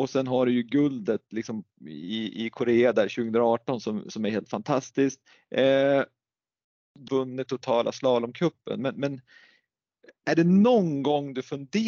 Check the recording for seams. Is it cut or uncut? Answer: cut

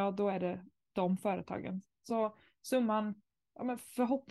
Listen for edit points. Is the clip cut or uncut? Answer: uncut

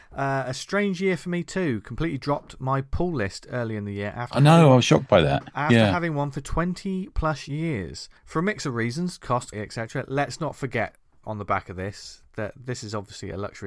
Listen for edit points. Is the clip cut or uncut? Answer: cut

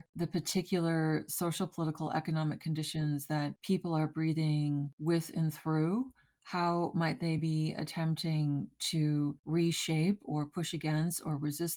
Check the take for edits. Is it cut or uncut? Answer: uncut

